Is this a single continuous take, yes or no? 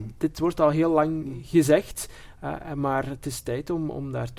yes